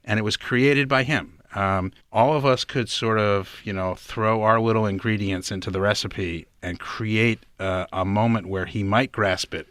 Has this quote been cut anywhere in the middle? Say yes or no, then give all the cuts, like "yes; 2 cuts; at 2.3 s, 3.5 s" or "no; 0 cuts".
yes; 1 cut; at 2.0 s